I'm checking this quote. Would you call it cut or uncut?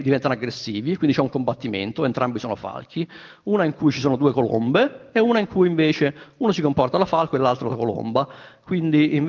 uncut